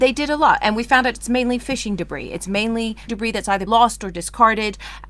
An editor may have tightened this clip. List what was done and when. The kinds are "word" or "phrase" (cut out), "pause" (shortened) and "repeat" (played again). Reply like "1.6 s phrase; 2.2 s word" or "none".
3.1 s word; 3.7 s word